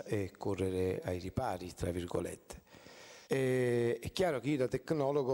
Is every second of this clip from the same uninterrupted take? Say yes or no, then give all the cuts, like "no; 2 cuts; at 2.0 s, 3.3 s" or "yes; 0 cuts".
no; 1 cut; at 3.2 s